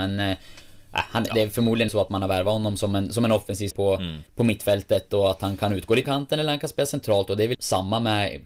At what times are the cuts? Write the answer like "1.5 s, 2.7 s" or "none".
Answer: 1.9 s, 3.7 s, 4.3 s, 6.0 s, 7.5 s